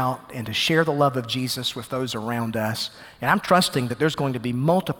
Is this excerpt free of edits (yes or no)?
yes